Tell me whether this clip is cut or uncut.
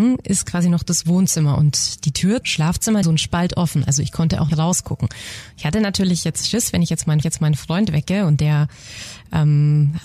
cut